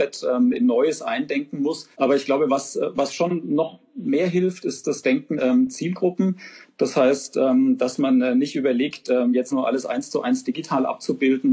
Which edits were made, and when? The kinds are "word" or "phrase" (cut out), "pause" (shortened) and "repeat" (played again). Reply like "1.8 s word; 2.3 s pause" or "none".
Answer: 1.9 s pause; 5.4 s word; 9.5 s word

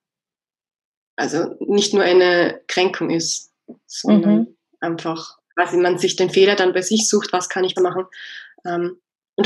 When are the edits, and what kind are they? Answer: 5.5 s pause; 6.2 s word; 7.8 s word

